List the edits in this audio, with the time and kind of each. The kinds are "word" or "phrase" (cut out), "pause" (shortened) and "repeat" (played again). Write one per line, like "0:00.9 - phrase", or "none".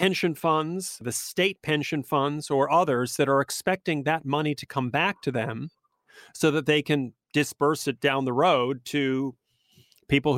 none